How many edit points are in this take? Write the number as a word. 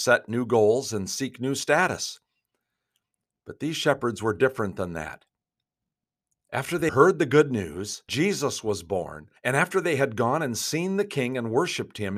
three